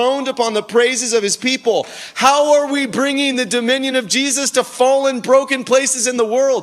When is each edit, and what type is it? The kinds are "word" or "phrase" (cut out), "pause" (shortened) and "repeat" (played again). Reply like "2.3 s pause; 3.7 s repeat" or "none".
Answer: none